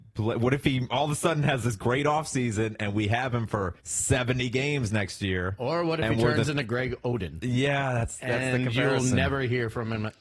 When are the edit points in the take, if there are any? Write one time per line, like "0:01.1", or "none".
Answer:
0:03.8